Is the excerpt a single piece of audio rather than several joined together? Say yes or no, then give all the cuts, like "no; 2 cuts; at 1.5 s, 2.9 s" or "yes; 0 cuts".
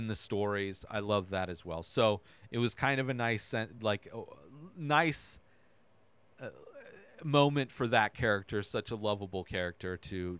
yes; 0 cuts